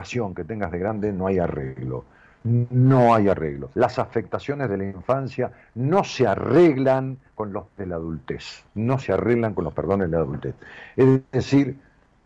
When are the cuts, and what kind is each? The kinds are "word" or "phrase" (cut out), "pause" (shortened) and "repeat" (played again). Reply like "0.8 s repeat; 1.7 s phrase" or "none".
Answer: 3.7 s pause; 7.7 s word; 8.7 s pause